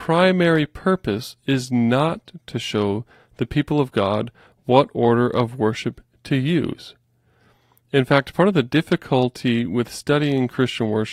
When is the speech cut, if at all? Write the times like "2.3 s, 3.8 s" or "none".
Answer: none